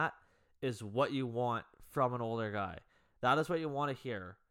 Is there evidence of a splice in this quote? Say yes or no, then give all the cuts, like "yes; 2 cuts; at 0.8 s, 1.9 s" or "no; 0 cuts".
no; 0 cuts